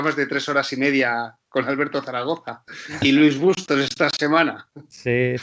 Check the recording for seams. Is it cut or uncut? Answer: cut